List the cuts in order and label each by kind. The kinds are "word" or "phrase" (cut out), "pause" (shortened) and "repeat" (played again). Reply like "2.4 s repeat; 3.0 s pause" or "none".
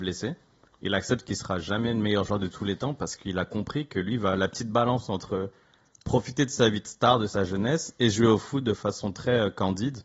none